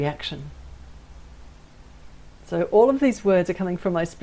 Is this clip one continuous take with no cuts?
yes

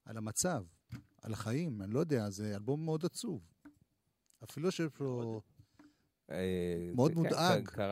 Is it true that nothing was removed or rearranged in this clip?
yes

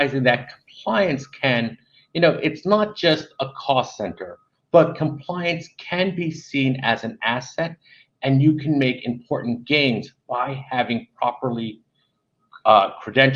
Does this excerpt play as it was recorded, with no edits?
yes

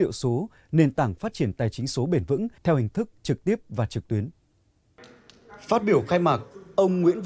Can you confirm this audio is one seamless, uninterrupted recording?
no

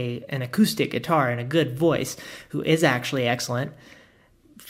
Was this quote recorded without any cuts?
yes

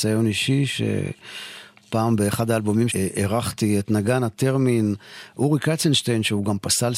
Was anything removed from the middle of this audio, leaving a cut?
yes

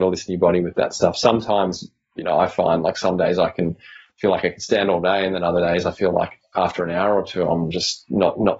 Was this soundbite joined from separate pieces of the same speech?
no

